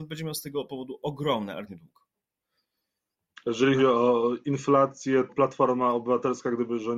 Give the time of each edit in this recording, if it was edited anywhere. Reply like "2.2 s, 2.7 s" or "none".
1.7 s, 3.8 s, 5.3 s